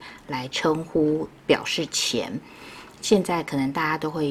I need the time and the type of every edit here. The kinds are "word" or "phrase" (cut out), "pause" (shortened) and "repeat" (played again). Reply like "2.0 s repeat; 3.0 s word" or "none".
1.4 s pause